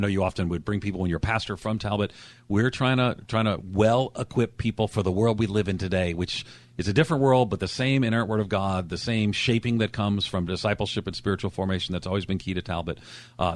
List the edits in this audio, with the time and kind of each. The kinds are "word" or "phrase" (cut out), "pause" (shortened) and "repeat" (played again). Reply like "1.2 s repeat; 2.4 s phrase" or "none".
none